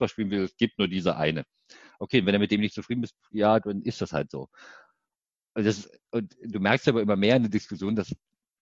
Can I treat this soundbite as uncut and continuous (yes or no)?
yes